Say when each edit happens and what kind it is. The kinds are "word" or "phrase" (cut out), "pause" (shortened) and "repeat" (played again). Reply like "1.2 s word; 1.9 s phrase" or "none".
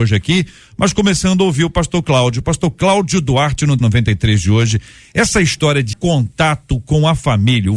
3.8 s word; 5.9 s word